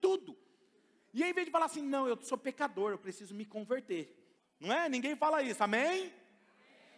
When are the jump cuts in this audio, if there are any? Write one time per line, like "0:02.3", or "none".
0:04.4